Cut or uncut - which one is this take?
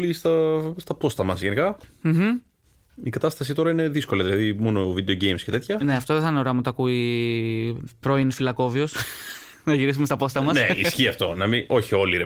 uncut